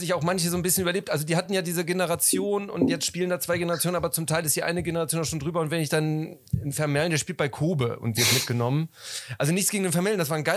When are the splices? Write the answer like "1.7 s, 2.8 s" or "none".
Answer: none